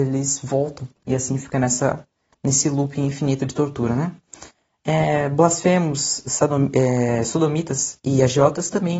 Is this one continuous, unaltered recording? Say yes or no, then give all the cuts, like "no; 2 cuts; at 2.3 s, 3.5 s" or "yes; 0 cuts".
yes; 0 cuts